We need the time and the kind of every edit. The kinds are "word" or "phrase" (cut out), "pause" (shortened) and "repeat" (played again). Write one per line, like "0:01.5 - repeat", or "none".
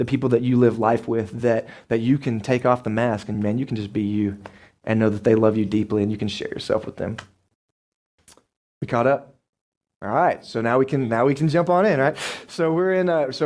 none